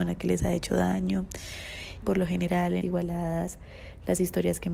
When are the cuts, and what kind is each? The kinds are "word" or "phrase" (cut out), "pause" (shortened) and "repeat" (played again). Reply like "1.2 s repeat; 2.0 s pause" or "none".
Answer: 2.0 s word; 2.8 s word